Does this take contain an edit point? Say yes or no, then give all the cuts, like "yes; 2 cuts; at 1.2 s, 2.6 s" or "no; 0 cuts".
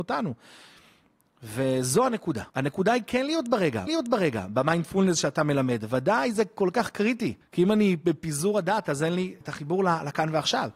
yes; 4 cuts; at 2.5 s, 3.9 s, 7.4 s, 9.4 s